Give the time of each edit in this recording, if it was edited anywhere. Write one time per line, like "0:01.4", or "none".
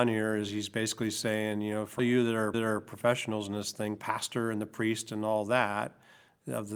0:02.0
0:02.5
0:04.0

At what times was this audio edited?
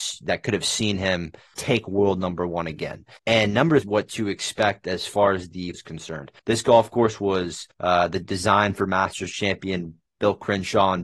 0:01.5
0:03.2
0:03.8
0:05.7
0:06.4
0:07.7
0:08.2

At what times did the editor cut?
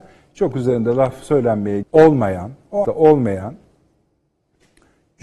0:01.8
0:02.8

